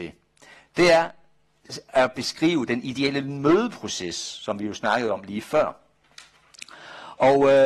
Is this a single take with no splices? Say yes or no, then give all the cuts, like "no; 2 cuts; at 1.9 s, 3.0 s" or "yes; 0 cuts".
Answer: yes; 0 cuts